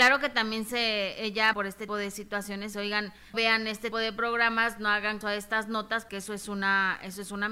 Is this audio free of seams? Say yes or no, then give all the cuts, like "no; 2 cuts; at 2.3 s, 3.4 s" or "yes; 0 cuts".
no; 7 cuts; at 1.5 s, 1.9 s, 2.7 s, 3.3 s, 3.9 s, 5.2 s, 6.1 s